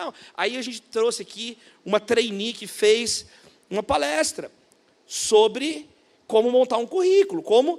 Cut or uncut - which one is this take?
uncut